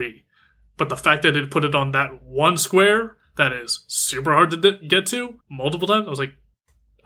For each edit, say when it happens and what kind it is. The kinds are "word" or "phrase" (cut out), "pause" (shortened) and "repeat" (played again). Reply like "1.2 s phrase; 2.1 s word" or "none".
5.4 s pause